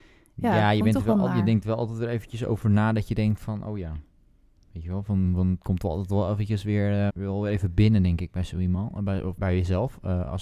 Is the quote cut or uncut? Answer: cut